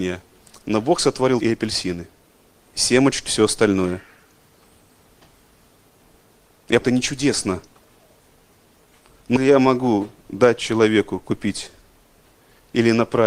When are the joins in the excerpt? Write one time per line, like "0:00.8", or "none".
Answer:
0:01.4
0:02.7
0:03.3
0:06.8
0:09.4